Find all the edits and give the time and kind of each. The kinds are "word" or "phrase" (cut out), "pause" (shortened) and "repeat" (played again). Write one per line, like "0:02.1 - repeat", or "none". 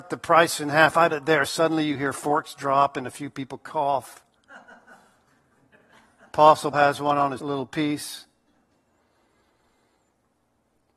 0:01.1 - word
0:06.7 - word
0:07.4 - word